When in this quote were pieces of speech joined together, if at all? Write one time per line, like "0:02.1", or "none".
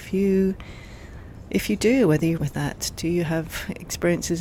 0:02.4